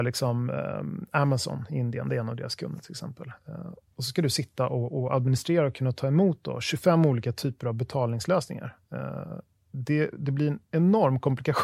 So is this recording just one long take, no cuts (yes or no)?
yes